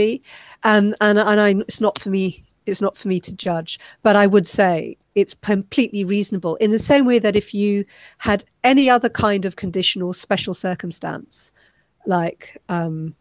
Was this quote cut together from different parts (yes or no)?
no